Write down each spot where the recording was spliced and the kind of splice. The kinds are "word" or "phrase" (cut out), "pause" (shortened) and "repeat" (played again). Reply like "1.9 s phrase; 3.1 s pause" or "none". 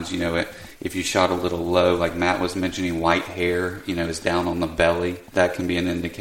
5.3 s pause